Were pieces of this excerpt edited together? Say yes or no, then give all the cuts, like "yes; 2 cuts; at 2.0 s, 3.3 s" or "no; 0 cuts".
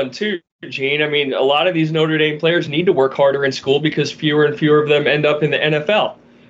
no; 0 cuts